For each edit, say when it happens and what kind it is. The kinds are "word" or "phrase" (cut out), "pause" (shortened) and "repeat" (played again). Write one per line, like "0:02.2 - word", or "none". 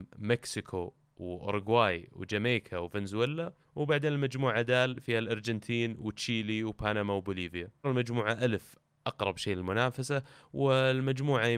0:03.6 - pause
0:07.8 - word